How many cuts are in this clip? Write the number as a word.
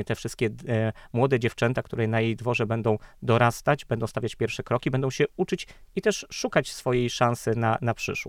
zero